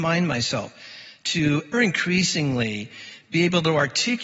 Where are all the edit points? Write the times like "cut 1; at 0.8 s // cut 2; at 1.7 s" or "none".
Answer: cut 1; at 1.7 s